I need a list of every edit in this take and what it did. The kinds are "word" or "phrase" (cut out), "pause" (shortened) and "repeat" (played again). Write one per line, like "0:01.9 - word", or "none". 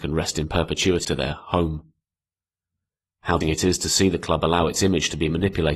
0:01.0 - word
0:03.4 - word